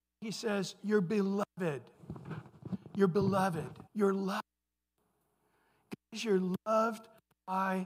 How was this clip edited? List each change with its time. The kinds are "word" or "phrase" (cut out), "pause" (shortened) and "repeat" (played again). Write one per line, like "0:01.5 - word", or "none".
0:03.9 - pause